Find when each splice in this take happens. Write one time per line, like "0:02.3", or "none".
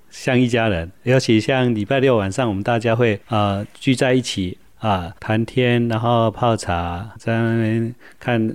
0:03.2
0:05.2
0:07.2